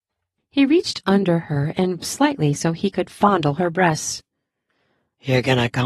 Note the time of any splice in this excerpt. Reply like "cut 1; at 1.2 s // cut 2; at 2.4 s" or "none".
cut 1; at 2.0 s